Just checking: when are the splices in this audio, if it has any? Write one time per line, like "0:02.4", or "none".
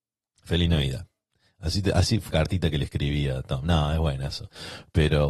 0:02.3